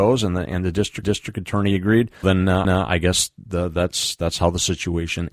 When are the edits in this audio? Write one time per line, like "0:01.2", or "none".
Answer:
0:01.0
0:02.2
0:02.6